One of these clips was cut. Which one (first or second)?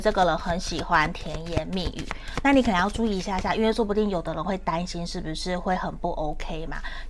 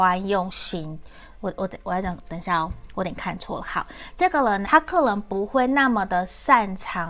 second